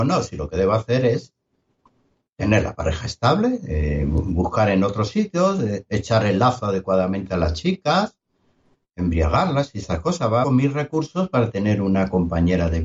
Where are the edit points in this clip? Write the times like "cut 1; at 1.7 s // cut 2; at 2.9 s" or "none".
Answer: cut 1; at 10.4 s